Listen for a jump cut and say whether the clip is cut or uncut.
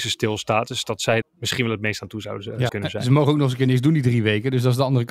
cut